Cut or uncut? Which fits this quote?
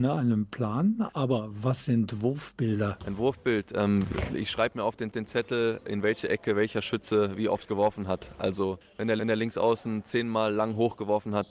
cut